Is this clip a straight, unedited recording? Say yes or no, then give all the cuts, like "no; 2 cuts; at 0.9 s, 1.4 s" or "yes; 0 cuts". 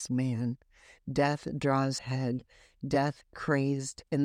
no; 2 cuts; at 2.0 s, 3.2 s